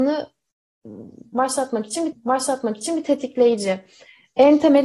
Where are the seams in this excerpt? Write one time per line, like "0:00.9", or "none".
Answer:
0:02.1